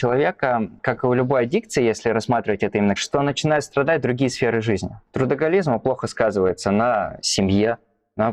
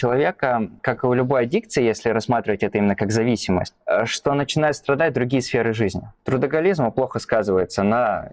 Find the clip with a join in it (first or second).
first